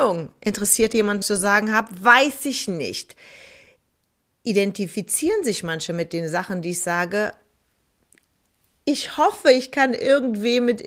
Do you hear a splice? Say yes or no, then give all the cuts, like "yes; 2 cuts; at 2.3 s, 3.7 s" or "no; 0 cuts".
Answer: yes; 1 cut; at 1.2 s